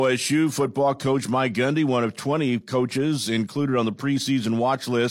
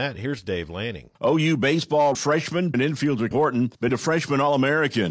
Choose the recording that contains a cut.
second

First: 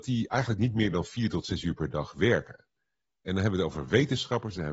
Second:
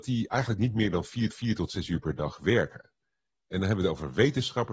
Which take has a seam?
second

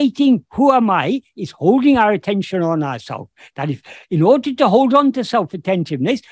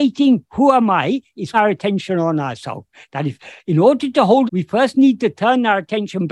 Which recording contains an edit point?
second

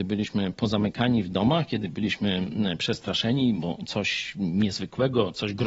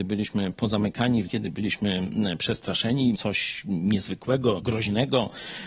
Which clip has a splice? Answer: second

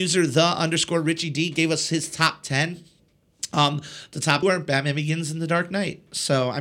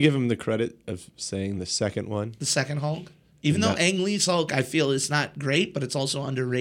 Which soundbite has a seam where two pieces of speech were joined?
first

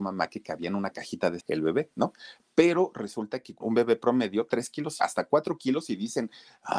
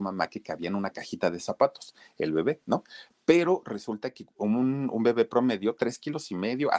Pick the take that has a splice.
first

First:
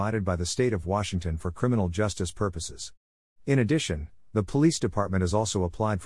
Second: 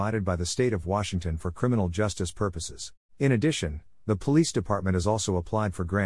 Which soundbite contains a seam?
second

